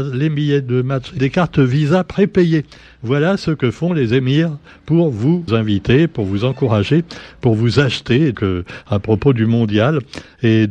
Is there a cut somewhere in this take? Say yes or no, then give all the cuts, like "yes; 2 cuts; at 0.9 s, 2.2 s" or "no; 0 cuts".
yes; 3 cuts; at 1.2 s, 5.5 s, 8.3 s